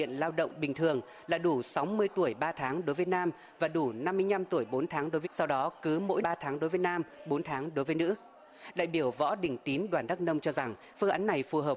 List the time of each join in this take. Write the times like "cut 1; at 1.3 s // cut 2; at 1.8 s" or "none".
cut 1; at 5.2 s // cut 2; at 6.2 s